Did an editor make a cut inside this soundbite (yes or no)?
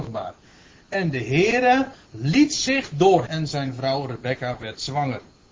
yes